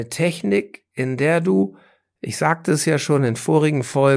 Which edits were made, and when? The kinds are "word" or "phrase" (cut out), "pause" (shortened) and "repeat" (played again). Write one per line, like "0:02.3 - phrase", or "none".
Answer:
none